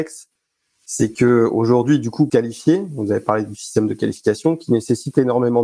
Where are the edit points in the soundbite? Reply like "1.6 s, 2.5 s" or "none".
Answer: 2.3 s